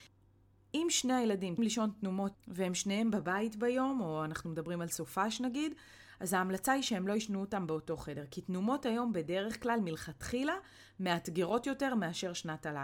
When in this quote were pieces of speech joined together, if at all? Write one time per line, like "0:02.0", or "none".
0:01.6
0:02.3